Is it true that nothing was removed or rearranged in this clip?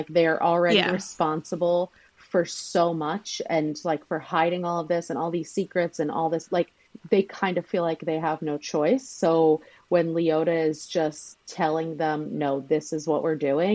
yes; 0 cuts

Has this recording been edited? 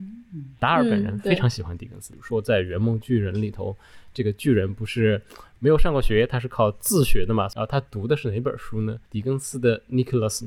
yes; 1 cut; at 9.1 s

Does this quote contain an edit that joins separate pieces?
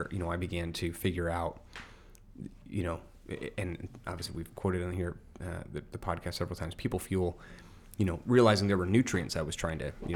no; 0 cuts

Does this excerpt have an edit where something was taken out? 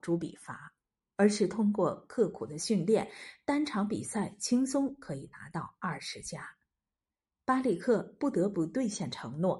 no; 0 cuts

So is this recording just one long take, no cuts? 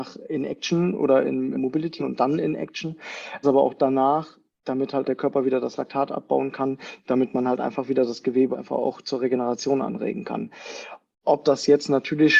no; 6 cuts; at 1.5 s, 2.0 s, 3.4 s, 4.5 s, 5.0 s, 8.5 s

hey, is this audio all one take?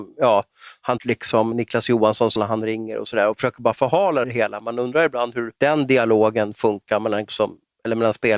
no; 6 cuts; at 1.0 s, 1.5 s, 2.4 s, 4.2 s, 5.6 s, 7.3 s

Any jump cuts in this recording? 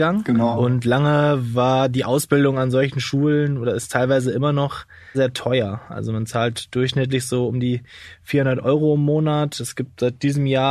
yes; 1 cut; at 5.1 s

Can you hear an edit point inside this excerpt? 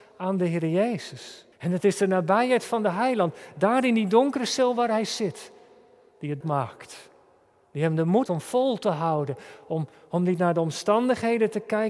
yes; 3 cuts; at 1.5 s, 6.4 s, 8.3 s

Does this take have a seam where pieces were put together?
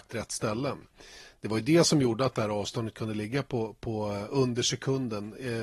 no; 0 cuts

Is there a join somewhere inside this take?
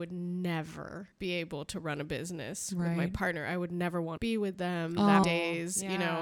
yes; 3 cuts; at 1.1 s, 4.2 s, 5.2 s

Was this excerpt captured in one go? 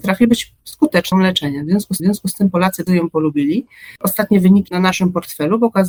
no; 5 cuts; at 1.1 s, 2.0 s, 2.9 s, 4.0 s, 4.7 s

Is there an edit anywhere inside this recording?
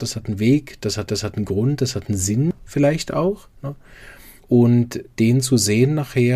yes; 2 cuts; at 1.1 s, 4.4 s

